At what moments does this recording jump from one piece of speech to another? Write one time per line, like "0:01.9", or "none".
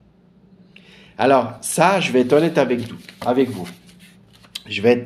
none